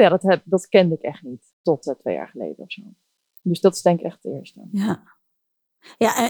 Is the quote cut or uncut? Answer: uncut